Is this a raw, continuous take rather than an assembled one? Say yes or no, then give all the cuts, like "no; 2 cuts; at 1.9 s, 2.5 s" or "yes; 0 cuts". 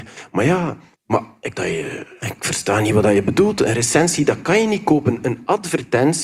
no; 2 cuts; at 0.9 s, 1.5 s